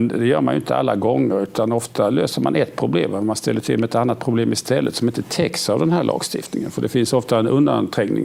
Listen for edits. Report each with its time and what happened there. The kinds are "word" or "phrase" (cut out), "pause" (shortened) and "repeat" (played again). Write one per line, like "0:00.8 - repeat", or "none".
none

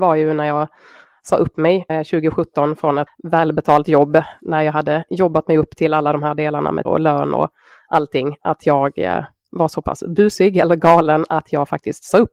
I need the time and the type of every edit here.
0:01.9 - word
0:03.1 - word
0:06.8 - word

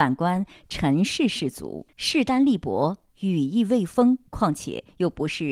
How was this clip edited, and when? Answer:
0:01.9 - pause
0:04.3 - pause

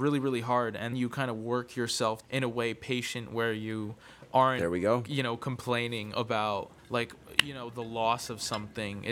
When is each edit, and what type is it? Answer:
0:00.9 - word
0:02.2 - phrase
0:06.8 - pause

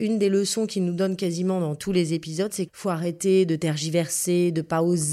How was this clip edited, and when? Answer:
0:02.7 - word

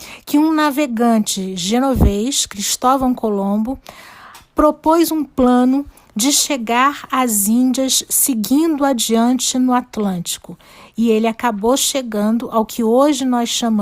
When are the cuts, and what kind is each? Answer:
none

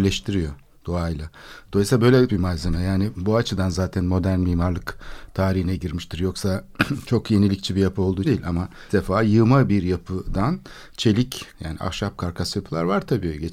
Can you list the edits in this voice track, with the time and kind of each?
0:02.3 - word
0:08.2 - word
0:08.9 - word
0:11.5 - word

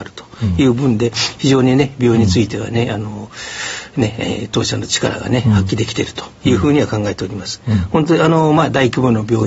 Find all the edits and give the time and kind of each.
none

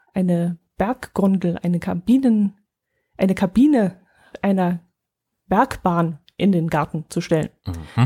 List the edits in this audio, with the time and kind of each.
none

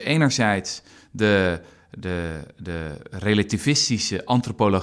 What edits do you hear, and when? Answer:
none

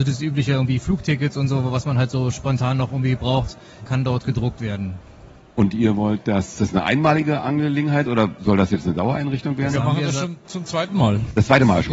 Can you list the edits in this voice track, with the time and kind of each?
none

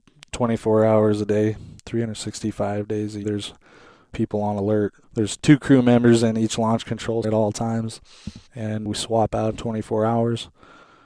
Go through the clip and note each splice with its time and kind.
0:01.8 - pause
0:03.2 - word
0:05.0 - pause
0:07.2 - word
0:08.5 - pause
0:09.5 - word

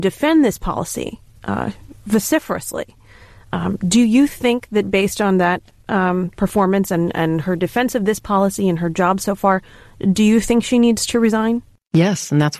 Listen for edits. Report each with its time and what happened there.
none

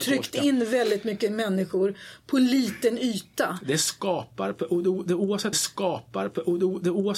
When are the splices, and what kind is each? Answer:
0:05.5 - repeat

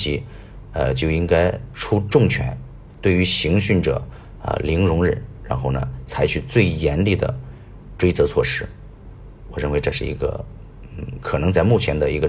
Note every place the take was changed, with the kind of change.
0:02.9 - pause

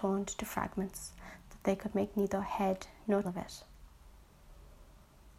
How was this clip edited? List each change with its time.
0:03.2 - word

